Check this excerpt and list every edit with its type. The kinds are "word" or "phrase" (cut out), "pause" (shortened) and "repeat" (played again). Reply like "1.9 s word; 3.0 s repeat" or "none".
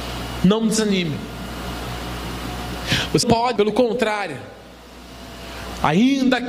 3.2 s word; 3.6 s word